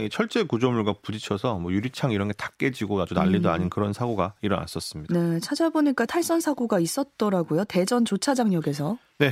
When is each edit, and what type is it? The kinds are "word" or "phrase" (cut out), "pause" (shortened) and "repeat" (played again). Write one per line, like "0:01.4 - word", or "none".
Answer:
0:06.1 - word